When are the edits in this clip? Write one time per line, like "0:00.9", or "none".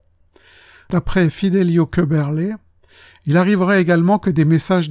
none